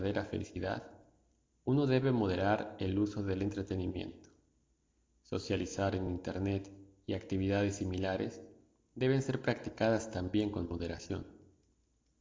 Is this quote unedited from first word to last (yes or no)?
yes